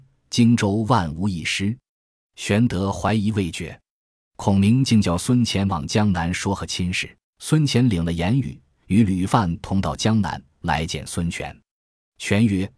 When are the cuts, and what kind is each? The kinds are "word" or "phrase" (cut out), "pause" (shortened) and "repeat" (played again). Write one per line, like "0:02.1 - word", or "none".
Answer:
0:07.2 - pause